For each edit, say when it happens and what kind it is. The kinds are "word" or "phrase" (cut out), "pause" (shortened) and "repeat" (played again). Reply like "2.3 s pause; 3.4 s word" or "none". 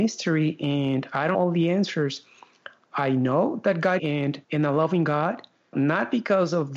1.3 s word; 4.0 s phrase; 4.4 s pause; 5.7 s word